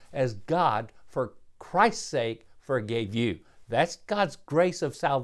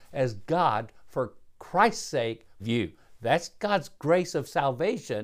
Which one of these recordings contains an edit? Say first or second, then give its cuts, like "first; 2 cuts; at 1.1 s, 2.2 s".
second; 1 cut; at 2.6 s